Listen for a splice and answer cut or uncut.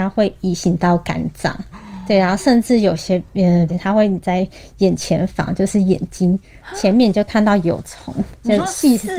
cut